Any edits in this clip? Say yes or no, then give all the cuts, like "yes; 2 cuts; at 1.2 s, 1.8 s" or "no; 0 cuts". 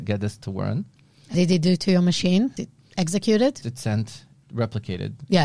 yes; 4 cuts; at 1.3 s, 2.6 s, 3.6 s, 4.4 s